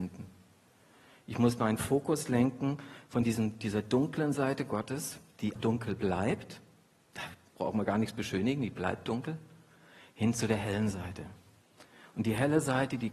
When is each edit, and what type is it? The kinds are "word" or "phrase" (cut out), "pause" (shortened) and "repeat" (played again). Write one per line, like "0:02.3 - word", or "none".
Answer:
0:05.5 - word